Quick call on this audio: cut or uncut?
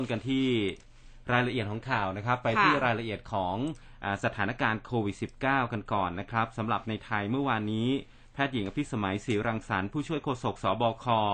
uncut